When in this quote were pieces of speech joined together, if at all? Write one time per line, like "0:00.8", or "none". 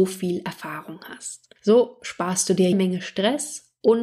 0:01.6
0:02.7